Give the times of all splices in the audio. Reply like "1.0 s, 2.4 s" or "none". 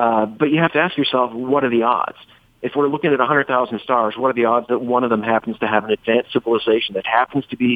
none

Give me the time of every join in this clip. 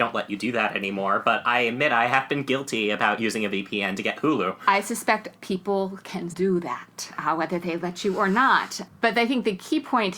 5.3 s, 6.3 s

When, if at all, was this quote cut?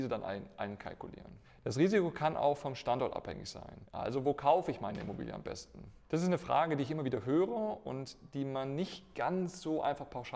none

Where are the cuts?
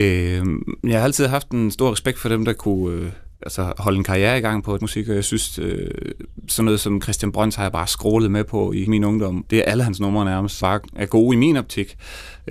3.3 s, 4.8 s, 8.9 s, 9.4 s, 10.6 s

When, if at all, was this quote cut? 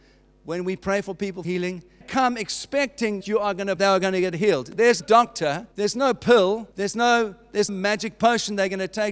1.4 s, 2.0 s, 3.2 s, 3.8 s, 5.0 s, 5.7 s, 6.7 s, 7.7 s

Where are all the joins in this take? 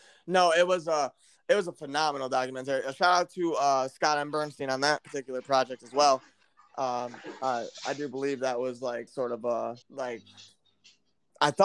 9.1 s, 9.8 s

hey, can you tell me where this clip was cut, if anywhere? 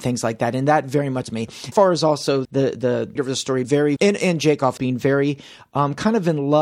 1.2 s, 1.7 s, 2.4 s, 3.2 s, 3.6 s, 4.0 s, 4.8 s

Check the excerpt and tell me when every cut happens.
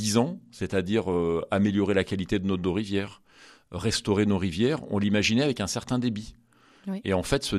none

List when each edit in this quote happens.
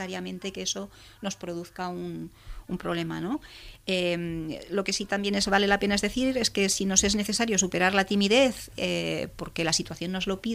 none

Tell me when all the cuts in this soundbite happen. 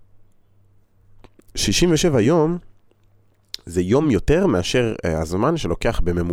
none

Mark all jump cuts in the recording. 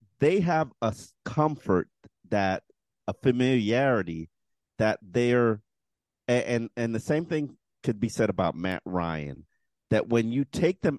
none

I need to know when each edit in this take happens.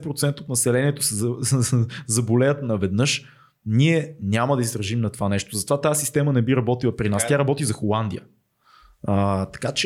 none

